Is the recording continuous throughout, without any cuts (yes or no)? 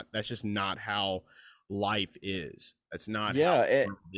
yes